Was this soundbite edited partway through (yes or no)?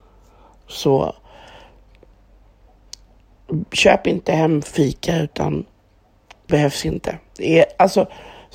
yes